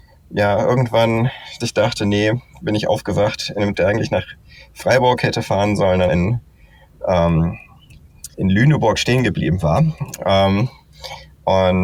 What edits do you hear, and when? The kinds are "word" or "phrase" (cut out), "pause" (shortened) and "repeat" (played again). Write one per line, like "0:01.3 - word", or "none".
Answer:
0:01.6 - word
0:03.7 - word
0:06.1 - word
0:08.3 - word